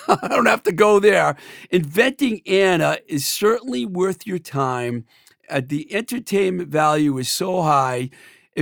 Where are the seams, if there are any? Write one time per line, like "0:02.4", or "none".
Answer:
none